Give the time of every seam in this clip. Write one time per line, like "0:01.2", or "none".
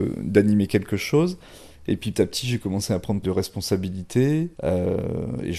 0:02.1
0:03.2
0:04.5